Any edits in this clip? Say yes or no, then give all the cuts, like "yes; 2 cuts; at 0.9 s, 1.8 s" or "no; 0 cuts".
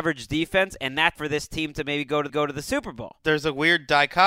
yes; 2 cuts; at 1.2 s, 2.3 s